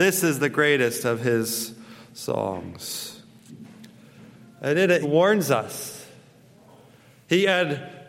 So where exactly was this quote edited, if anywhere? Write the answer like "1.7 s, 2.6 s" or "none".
5.0 s